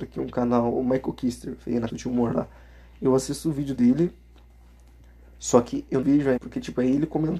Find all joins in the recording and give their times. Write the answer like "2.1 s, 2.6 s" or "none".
1.9 s, 6.0 s, 6.4 s

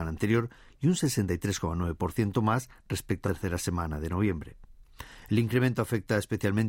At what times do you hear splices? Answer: 3.2 s

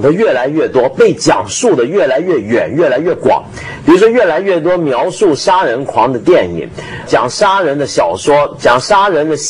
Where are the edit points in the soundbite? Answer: 7.1 s

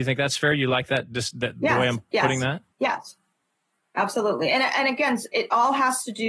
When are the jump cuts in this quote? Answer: 2.7 s

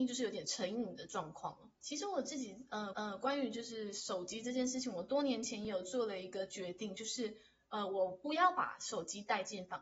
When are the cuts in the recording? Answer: 1.8 s, 2.9 s

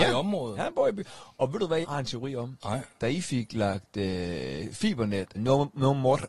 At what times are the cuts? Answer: 1.8 s, 5.3 s

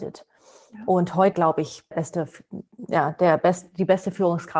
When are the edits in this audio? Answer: 1.3 s, 1.9 s

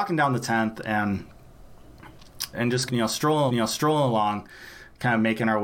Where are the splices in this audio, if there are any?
2.5 s, 2.9 s, 3.5 s

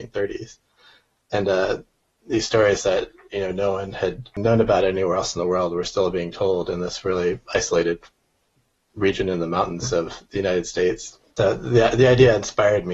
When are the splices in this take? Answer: none

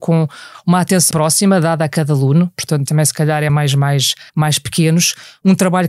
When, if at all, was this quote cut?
1.1 s, 2.9 s, 3.5 s, 4.3 s

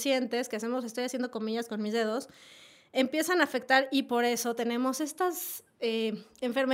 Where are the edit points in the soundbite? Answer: none

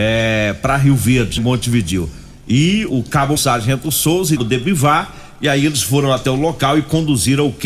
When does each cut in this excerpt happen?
1.4 s, 2.9 s, 3.4 s, 4.4 s

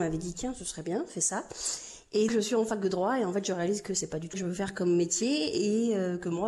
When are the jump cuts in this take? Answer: 2.3 s, 4.3 s

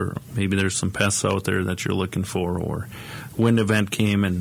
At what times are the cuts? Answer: none

